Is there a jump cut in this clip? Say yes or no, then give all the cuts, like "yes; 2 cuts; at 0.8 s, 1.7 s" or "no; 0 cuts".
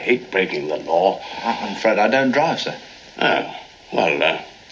no; 0 cuts